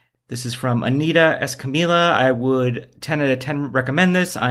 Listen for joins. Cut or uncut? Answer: uncut